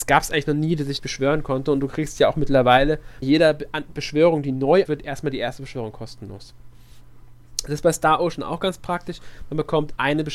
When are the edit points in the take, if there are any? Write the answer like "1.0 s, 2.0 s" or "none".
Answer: 1.0 s, 3.2 s, 4.8 s